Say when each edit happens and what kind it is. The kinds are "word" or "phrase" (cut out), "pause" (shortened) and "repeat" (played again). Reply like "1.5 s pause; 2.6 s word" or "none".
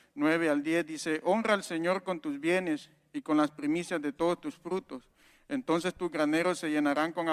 none